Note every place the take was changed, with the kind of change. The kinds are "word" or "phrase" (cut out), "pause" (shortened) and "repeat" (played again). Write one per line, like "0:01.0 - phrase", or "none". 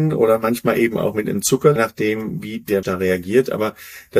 0:01.8 - word
0:02.8 - word